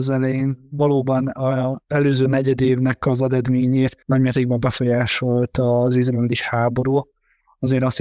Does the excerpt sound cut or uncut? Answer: cut